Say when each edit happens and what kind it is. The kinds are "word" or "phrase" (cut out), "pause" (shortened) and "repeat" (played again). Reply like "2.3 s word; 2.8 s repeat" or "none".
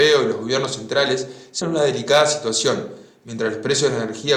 1.6 s word